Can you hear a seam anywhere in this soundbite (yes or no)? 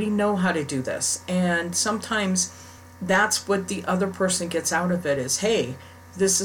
no